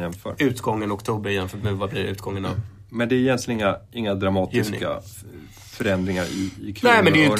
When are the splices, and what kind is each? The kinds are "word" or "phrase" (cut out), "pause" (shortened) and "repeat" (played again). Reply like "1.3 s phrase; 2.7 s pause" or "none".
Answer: 2.9 s pause